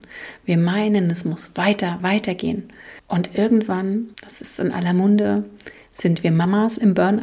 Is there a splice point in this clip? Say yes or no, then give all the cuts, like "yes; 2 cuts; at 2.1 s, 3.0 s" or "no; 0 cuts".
yes; 3 cuts; at 2.0 s, 3.0 s, 4.1 s